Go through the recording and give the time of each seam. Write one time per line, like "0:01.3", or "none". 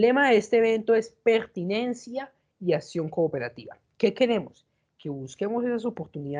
none